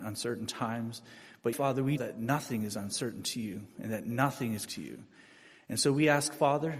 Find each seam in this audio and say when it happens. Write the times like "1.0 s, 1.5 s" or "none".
1.5 s, 2.0 s, 4.7 s